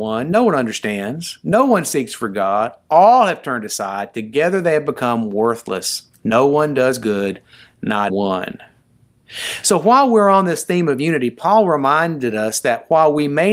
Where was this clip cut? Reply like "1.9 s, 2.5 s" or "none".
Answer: 6.1 s, 8.1 s